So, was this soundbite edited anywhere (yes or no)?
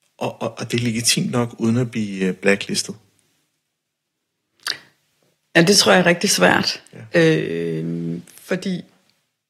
no